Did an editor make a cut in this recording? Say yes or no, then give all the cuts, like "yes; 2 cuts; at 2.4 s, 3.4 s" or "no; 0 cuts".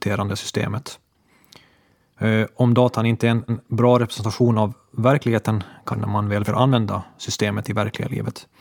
yes; 3 cuts; at 3.5 s, 5.9 s, 6.5 s